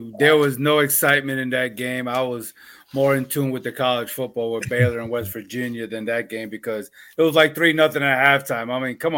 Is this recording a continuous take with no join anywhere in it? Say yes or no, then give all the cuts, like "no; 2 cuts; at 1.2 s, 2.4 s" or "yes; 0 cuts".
yes; 0 cuts